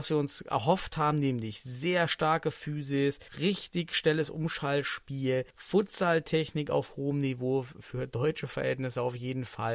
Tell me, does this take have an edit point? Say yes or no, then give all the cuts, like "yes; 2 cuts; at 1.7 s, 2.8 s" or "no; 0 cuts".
yes; 2 cuts; at 3.3 s, 5.5 s